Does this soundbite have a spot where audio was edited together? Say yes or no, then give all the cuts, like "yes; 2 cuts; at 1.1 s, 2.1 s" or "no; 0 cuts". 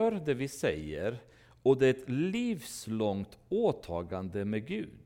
no; 0 cuts